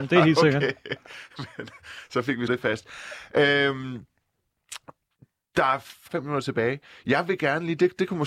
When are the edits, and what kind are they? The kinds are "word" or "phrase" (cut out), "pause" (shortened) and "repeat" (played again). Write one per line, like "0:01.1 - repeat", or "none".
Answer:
0:02.5 - word
0:06.1 - word